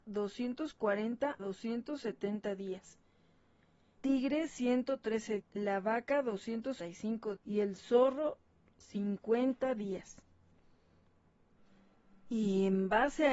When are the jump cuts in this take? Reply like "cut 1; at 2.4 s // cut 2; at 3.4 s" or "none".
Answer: cut 1; at 1.4 s // cut 2; at 4.0 s // cut 3; at 5.4 s // cut 4; at 6.8 s // cut 5; at 7.4 s